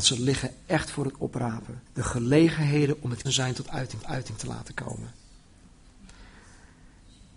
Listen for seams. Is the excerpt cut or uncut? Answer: cut